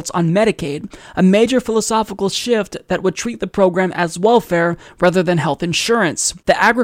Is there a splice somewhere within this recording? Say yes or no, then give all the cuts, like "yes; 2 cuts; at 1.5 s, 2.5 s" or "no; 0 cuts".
no; 0 cuts